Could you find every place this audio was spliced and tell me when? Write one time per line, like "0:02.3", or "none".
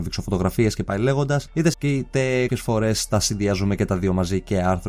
0:01.7
0:02.5